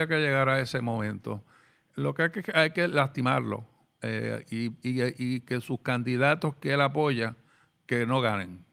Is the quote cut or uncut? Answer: uncut